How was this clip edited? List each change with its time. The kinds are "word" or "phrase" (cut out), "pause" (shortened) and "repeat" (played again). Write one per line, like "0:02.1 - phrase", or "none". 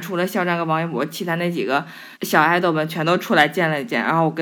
0:02.1 - pause